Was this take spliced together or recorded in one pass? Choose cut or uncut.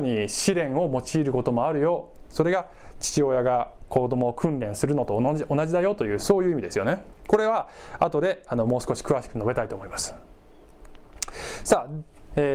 cut